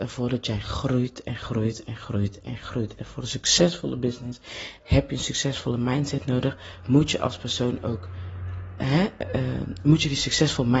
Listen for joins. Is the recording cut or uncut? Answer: cut